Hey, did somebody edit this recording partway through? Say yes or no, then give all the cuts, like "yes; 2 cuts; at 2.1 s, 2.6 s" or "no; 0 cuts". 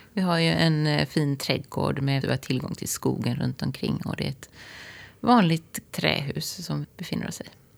yes; 3 cuts; at 2.2 s, 5.9 s, 6.8 s